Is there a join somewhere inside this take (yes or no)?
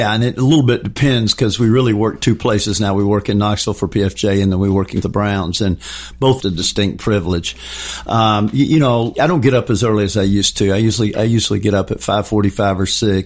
yes